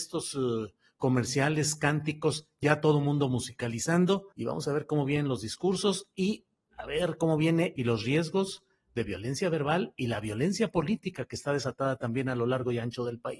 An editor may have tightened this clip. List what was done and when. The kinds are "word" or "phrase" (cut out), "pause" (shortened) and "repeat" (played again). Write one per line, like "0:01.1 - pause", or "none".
0:04.3 - pause
0:07.8 - phrase